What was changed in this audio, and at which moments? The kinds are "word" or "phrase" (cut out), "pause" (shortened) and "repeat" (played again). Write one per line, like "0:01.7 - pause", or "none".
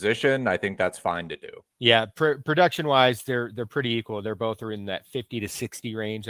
0:01.7 - pause